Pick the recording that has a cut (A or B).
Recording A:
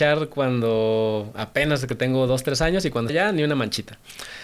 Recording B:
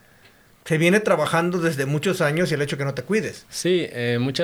A